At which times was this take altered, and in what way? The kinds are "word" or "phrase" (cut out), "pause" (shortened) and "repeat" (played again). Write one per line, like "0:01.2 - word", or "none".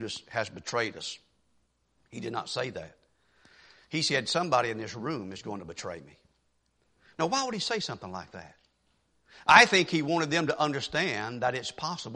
none